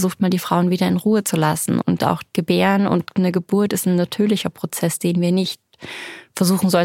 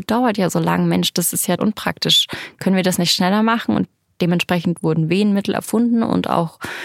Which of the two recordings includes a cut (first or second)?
second